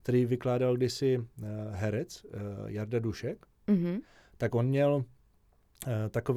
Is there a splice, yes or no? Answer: no